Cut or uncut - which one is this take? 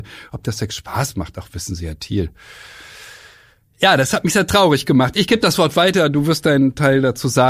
uncut